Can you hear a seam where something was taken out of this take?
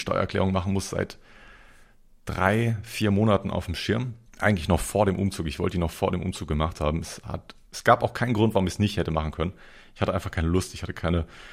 yes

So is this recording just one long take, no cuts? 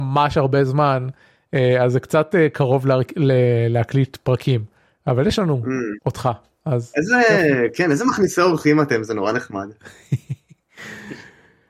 yes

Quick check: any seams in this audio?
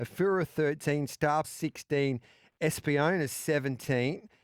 yes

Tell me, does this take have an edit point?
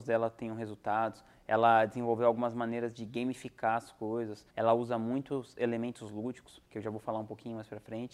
yes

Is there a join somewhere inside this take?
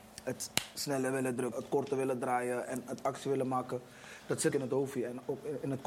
yes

